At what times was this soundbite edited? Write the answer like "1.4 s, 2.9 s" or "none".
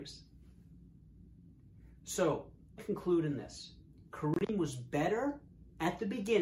2.8 s